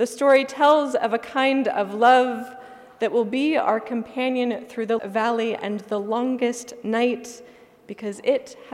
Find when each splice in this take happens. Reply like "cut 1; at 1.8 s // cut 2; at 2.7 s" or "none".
cut 1; at 5.0 s